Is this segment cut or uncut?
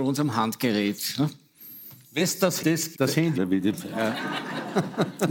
cut